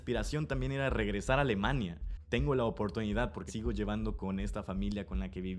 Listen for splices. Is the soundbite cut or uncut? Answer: cut